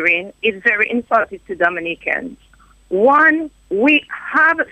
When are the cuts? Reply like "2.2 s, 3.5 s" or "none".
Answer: none